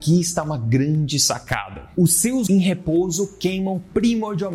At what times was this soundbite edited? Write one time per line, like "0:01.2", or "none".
0:02.5